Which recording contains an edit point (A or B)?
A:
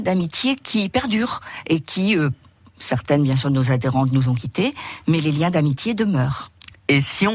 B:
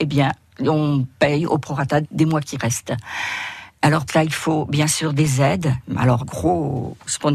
B